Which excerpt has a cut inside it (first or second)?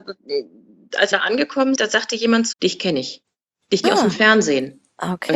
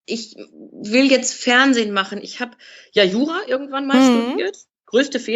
first